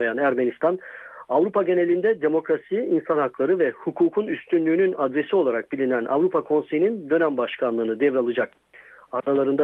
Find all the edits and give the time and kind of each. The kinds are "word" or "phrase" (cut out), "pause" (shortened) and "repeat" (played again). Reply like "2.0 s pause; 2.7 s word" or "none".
none